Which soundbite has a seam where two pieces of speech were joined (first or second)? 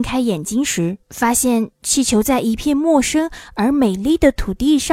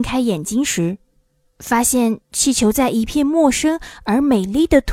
first